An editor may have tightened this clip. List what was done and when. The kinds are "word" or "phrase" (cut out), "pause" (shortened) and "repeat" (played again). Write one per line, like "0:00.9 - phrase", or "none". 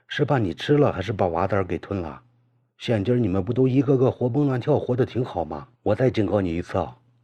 0:05.8 - pause